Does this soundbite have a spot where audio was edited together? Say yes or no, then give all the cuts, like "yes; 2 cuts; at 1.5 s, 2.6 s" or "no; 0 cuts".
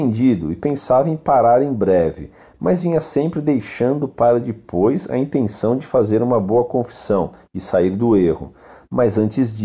no; 0 cuts